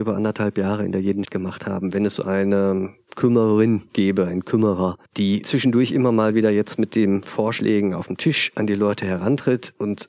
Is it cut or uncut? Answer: cut